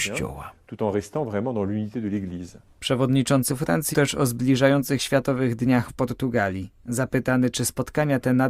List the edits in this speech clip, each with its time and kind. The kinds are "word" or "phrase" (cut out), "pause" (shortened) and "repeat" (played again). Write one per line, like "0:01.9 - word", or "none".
0:03.5 - word
0:03.9 - word
0:05.0 - word
0:05.9 - word